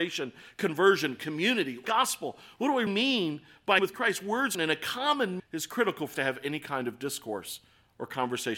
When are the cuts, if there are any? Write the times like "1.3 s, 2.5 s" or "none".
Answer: 1.8 s, 2.9 s, 3.8 s, 4.5 s, 5.4 s, 6.1 s